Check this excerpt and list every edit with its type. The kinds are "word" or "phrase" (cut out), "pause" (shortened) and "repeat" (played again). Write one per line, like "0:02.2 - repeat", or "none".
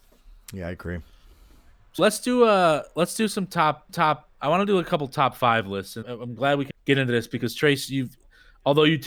0:02.0 - word
0:03.9 - repeat
0:06.0 - word
0:06.7 - word